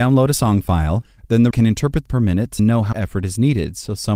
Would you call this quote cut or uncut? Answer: cut